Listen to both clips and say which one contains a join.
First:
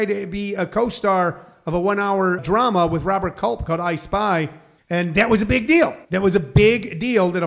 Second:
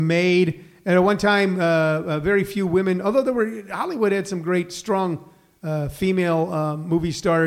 first; 3 cuts; at 2.4 s, 4.8 s, 6.0 s

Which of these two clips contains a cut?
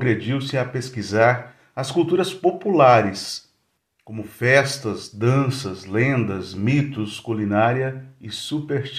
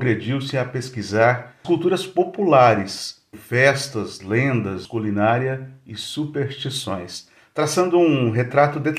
second; 4 cuts; at 1.6 s, 3.3 s, 4.2 s, 4.8 s

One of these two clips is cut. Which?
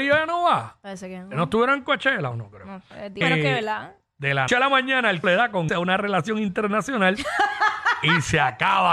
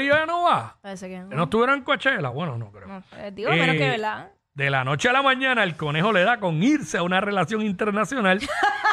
first; 5 cuts; at 2.3 s, 3.2 s, 4.5 s, 5.2 s, 5.7 s

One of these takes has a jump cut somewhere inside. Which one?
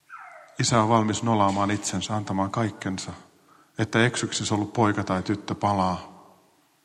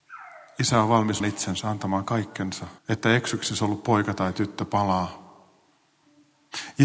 second; 2 cuts; at 1.2 s, 2.8 s

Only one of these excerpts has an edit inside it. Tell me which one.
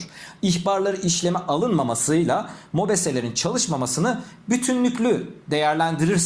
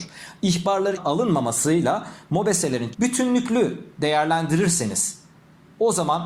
second; 2 cuts; at 1.0 s, 2.9 s

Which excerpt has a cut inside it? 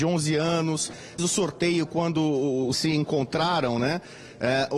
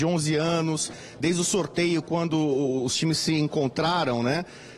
first; 2 cuts; at 1.2 s, 2.7 s

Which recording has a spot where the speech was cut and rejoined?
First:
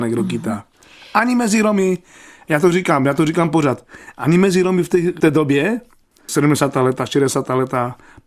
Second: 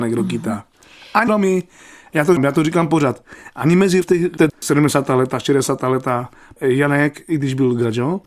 second; 5 cuts; at 1.3 s, 2.4 s, 4.0 s, 4.5 s, 6.6 s

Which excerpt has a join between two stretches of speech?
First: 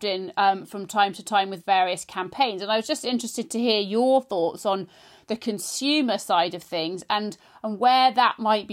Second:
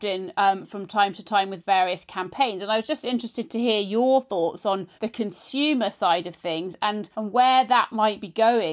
second; 2 cuts; at 4.9 s, 7.1 s

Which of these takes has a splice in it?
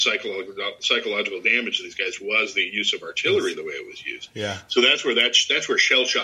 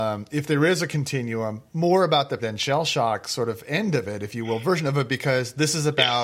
second; 1 cut; at 2.4 s

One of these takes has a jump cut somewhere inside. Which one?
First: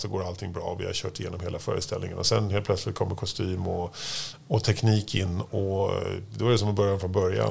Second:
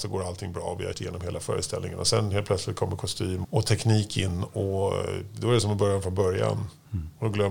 second; 2 cuts; at 0.9 s, 3.4 s

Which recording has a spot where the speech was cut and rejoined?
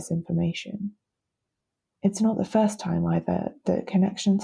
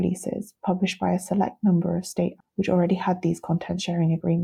second; 1 cut; at 2.4 s

